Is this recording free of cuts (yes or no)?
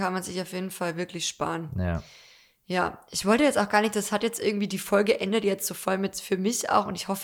yes